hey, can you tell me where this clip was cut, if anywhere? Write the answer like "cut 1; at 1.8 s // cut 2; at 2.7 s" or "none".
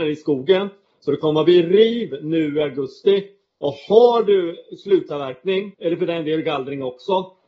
cut 1; at 5.7 s

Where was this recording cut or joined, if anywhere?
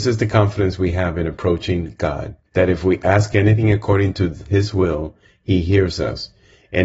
cut 1; at 2.4 s

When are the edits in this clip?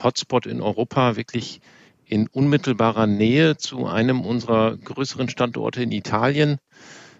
none

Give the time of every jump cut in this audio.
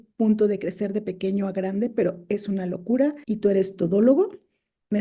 cut 1; at 3.2 s

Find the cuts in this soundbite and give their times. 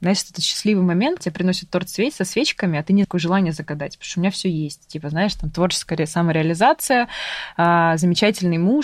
cut 1; at 1.2 s // cut 2; at 3.0 s

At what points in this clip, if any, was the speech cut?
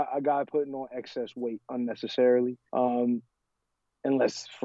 cut 1; at 2.7 s

